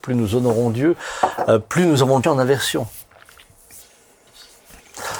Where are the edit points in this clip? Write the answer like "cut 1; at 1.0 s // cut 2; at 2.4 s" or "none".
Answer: cut 1; at 2.2 s